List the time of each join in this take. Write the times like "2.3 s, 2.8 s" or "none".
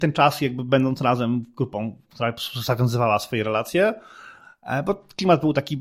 none